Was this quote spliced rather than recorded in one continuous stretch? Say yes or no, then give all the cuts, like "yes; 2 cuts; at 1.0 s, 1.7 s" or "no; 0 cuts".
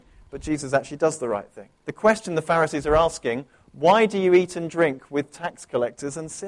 yes; 1 cut; at 1.8 s